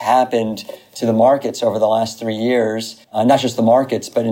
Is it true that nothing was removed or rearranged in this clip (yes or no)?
no